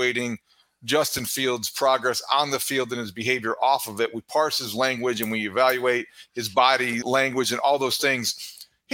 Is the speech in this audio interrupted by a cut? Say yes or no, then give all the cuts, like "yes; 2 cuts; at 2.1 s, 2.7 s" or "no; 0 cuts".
yes; 1 cut; at 7.0 s